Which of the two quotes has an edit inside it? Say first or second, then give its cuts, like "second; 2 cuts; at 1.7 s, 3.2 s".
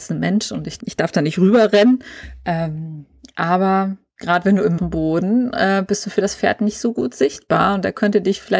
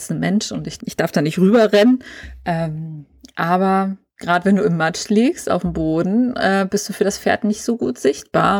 first; 1 cut; at 4.8 s